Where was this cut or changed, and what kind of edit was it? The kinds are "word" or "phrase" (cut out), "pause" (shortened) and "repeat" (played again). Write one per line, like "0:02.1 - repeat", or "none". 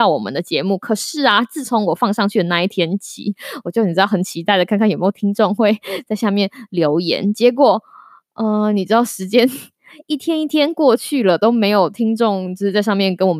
none